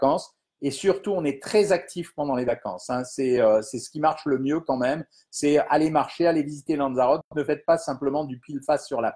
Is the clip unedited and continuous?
yes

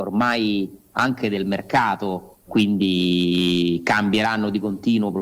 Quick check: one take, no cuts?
no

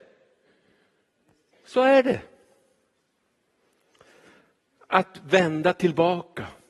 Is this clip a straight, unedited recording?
yes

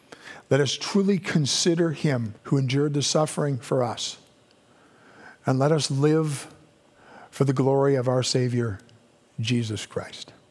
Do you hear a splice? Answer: yes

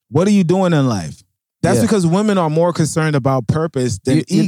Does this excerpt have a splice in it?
no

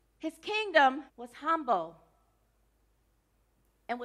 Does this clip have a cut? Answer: yes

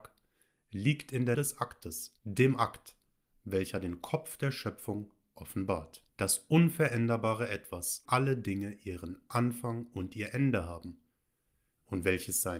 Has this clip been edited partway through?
yes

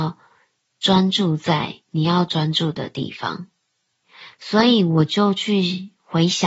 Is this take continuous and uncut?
no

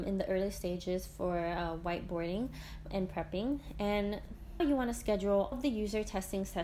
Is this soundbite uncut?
no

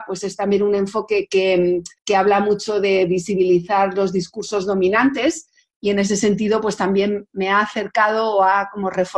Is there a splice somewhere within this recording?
yes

